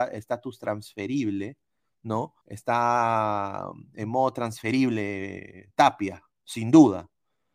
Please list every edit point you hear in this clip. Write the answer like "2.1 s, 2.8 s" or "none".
2.4 s